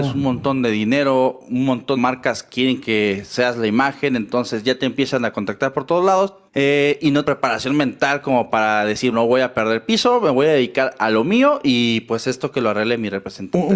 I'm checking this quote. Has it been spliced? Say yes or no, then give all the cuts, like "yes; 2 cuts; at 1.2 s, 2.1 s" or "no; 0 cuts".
yes; 4 cuts; at 2.0 s, 6.5 s, 7.2 s, 9.1 s